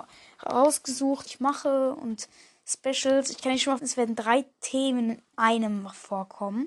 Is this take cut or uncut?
cut